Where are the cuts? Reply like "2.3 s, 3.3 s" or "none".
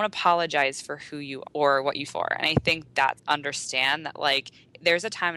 1.4 s, 2.0 s, 3.2 s